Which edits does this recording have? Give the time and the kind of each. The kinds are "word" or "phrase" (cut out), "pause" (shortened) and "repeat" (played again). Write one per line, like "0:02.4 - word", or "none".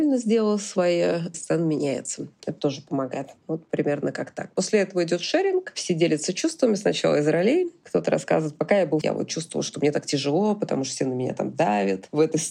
0:01.3 - phrase
0:09.0 - phrase